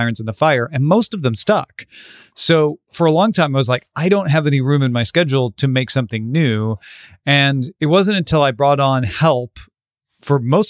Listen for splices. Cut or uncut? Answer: uncut